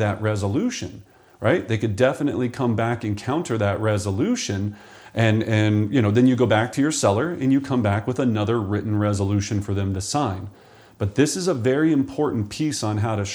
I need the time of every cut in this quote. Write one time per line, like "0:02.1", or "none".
none